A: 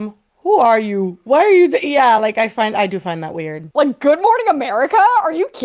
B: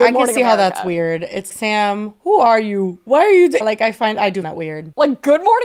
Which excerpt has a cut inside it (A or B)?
B